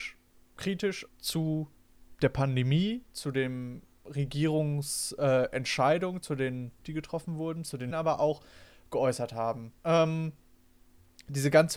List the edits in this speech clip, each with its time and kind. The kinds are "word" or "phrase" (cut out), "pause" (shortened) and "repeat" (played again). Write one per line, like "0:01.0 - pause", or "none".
0:01.1 - pause
0:06.8 - word
0:07.9 - word
0:09.8 - pause